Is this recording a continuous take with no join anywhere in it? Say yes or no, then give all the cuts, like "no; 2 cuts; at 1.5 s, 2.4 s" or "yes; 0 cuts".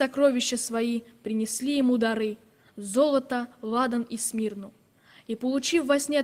yes; 0 cuts